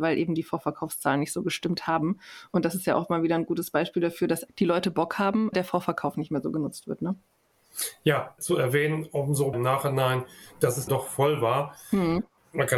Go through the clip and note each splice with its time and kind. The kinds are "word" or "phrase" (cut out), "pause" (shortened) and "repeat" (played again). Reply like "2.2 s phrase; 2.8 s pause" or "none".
4.5 s word; 5.5 s word; 8.4 s word; 9.5 s word; 10.9 s word